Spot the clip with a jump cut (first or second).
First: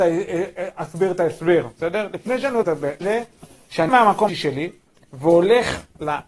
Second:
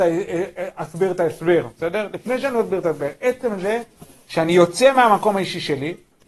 first